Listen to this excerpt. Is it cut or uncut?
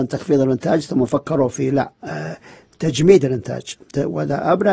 uncut